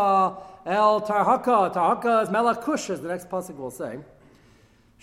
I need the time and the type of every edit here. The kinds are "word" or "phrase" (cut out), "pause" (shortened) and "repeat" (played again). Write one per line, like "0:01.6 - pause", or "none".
none